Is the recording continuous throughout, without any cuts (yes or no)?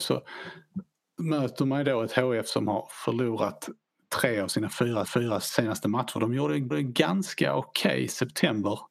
no